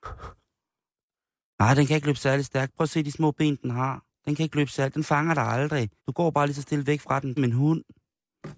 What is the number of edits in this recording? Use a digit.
2